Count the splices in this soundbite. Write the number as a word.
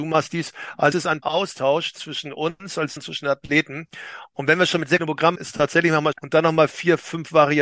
six